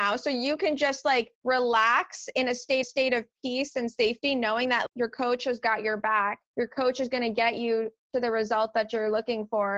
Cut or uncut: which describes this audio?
cut